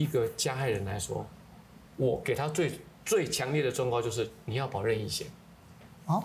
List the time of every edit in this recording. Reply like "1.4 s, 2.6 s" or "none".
1.9 s